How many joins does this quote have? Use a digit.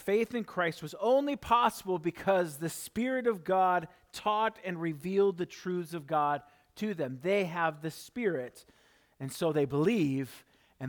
0